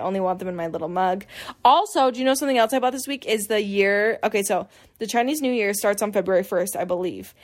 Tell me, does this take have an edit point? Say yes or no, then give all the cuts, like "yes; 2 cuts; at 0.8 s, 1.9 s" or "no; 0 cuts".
no; 0 cuts